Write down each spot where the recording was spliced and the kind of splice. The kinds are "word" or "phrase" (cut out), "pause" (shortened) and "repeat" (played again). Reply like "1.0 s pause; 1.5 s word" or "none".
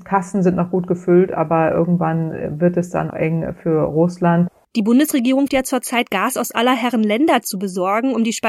3.1 s word; 5.5 s word